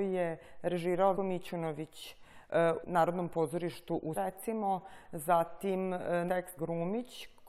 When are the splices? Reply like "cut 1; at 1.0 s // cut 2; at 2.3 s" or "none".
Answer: cut 1; at 1.1 s // cut 2; at 2.8 s // cut 3; at 4.1 s // cut 4; at 6.3 s // cut 5; at 6.6 s